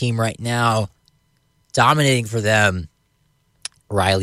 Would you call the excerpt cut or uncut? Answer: uncut